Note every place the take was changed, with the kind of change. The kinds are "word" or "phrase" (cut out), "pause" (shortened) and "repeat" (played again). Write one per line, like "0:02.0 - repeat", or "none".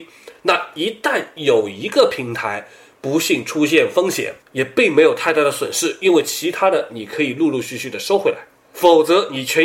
0:04.4 - pause